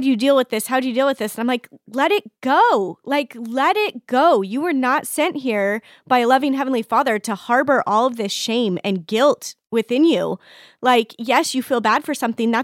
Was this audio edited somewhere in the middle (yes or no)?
no